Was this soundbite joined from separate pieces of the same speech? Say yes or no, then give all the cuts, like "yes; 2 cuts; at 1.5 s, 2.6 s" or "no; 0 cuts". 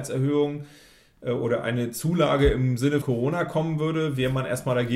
yes; 1 cut; at 3.0 s